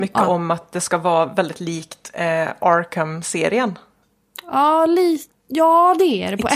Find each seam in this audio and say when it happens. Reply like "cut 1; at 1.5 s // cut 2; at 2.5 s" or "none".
none